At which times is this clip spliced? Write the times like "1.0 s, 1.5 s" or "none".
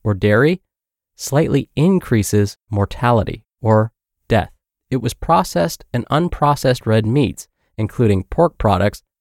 4.7 s